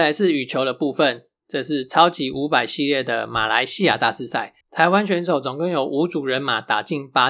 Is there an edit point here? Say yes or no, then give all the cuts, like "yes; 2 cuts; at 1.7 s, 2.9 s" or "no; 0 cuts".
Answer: yes; 1 cut; at 4.6 s